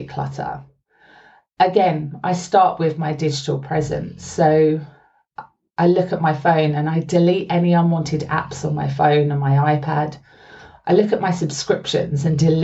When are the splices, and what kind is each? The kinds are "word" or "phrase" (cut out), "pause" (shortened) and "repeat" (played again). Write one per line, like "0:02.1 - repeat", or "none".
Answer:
none